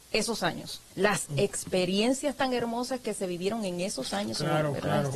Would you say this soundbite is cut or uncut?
cut